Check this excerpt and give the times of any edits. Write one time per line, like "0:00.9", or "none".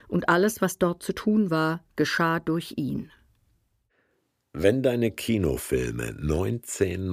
none